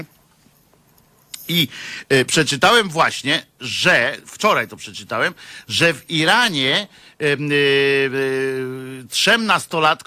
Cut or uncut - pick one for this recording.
uncut